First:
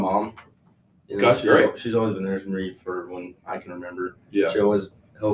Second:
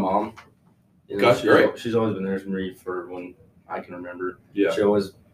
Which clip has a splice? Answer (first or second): first